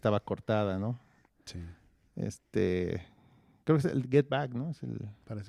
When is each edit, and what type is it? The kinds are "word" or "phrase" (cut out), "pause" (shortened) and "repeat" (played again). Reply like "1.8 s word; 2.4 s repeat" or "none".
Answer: none